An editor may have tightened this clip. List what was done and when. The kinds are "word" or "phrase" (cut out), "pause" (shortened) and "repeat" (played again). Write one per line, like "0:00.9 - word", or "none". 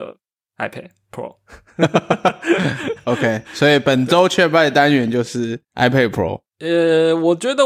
0:05.6 - pause